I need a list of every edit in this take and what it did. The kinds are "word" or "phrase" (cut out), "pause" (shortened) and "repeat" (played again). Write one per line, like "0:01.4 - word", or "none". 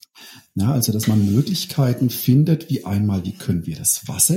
none